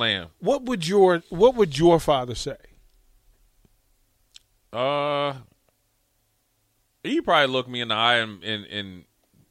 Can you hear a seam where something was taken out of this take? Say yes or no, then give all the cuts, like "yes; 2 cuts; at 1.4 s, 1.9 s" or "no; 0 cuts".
no; 0 cuts